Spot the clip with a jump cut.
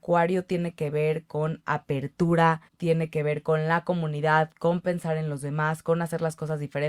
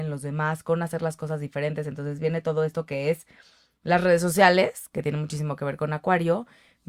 first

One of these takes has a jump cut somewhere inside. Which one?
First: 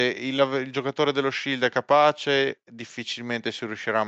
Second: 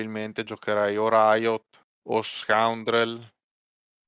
second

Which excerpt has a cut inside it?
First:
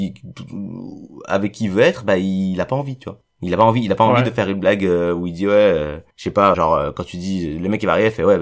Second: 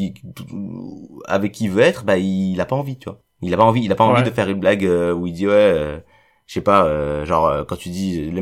first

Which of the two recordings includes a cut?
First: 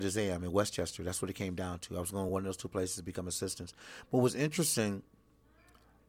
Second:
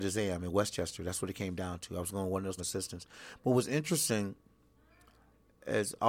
second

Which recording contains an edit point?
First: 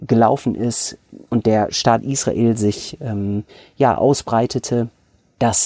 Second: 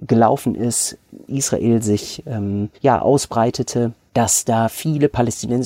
second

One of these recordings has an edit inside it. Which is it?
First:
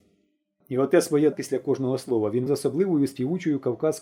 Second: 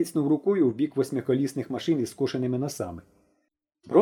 first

